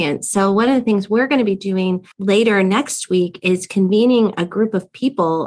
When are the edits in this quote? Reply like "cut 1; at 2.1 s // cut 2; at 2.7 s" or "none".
cut 1; at 2.1 s